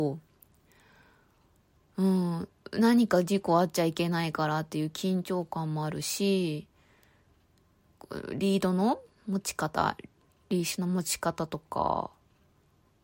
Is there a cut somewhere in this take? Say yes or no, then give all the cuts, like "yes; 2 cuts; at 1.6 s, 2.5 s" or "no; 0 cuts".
no; 0 cuts